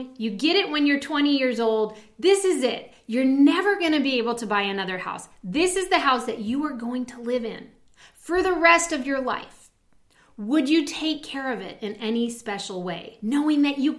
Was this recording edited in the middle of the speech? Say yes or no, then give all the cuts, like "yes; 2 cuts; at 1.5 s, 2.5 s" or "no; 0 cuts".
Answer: no; 0 cuts